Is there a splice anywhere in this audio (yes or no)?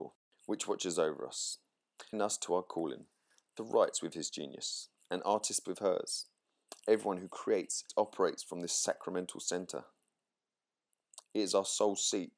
yes